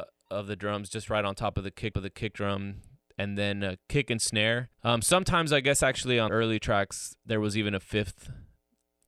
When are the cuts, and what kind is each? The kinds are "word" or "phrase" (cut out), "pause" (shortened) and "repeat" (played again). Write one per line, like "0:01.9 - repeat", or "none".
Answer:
0:01.9 - repeat
0:03.8 - pause
0:04.7 - pause
0:06.3 - word